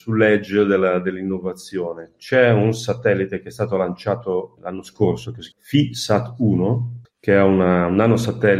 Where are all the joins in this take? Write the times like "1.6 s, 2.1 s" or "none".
4.6 s, 5.5 s, 7.0 s